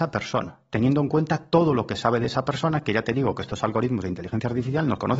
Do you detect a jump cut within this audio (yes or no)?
no